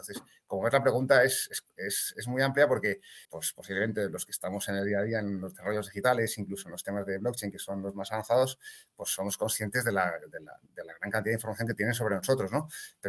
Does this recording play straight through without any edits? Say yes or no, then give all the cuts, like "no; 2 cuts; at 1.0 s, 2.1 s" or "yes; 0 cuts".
no; 2 cuts; at 3.2 s, 10.7 s